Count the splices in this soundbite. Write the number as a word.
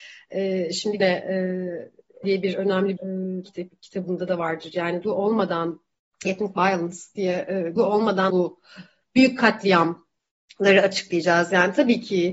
eight